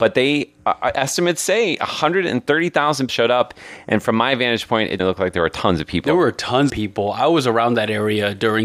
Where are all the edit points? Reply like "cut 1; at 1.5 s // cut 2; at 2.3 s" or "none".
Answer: cut 1; at 3.1 s // cut 2; at 5.0 s // cut 3; at 6.7 s